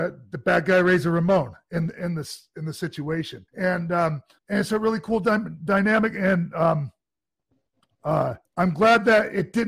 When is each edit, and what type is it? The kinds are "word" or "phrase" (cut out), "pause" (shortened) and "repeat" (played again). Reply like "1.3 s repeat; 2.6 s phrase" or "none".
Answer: 3.5 s pause; 4.4 s pause; 8.4 s pause